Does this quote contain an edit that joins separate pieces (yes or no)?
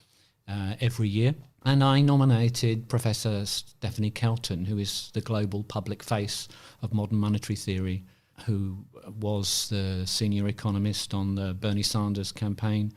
no